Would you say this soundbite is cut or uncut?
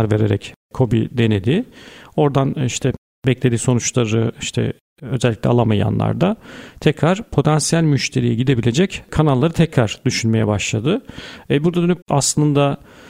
cut